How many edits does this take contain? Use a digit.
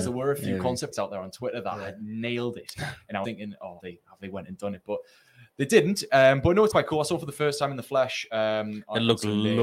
4